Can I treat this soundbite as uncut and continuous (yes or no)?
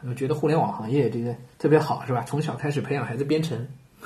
no